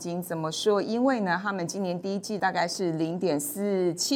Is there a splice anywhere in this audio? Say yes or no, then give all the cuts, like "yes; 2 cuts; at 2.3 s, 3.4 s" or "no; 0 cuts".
yes; 1 cut; at 2.4 s